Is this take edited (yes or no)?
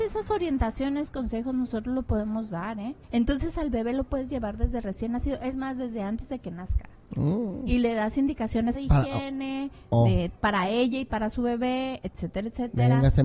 yes